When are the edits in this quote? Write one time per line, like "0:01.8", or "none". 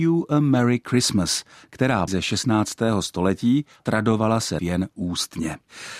0:02.1
0:03.8
0:04.6